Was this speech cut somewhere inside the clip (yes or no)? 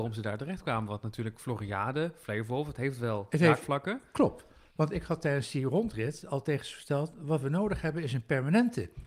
no